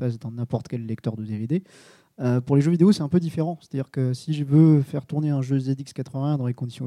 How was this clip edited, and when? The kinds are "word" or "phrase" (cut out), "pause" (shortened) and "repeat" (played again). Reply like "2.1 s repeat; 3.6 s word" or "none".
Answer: none